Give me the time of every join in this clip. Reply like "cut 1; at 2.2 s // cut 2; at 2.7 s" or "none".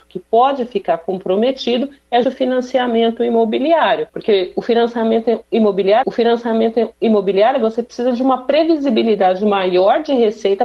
cut 1; at 2.2 s // cut 2; at 4.1 s // cut 3; at 6.0 s